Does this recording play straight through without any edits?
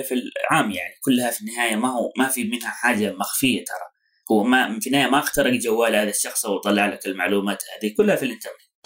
yes; 0 cuts

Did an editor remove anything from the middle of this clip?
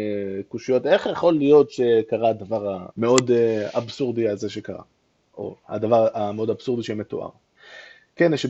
yes; 1 cut; at 2.9 s

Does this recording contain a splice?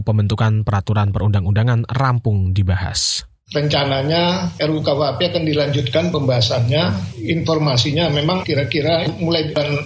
no; 0 cuts

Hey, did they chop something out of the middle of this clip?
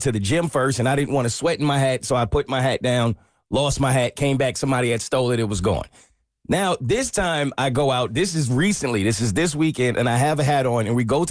no; 0 cuts

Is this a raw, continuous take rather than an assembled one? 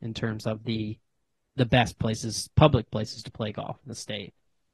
yes; 0 cuts

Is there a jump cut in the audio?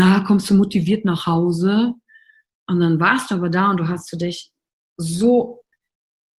no; 0 cuts

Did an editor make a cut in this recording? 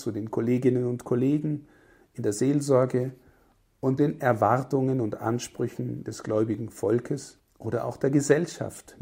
yes; 2 cuts; at 4.0 s, 7.4 s

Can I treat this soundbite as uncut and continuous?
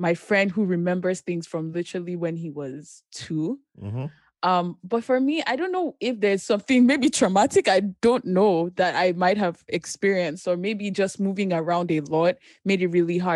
yes; 0 cuts

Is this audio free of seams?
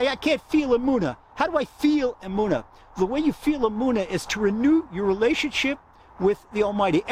yes; 0 cuts

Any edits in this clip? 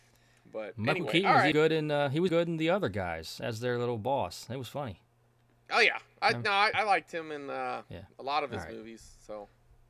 yes; 3 cuts; at 1.5 s, 2.3 s, 6.7 s

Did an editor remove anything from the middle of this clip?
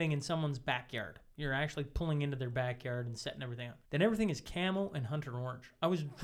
yes; 1 cut; at 3.8 s

